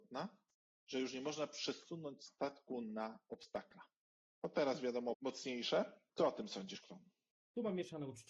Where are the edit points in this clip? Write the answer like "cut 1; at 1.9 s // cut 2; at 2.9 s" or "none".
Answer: cut 1; at 5.1 s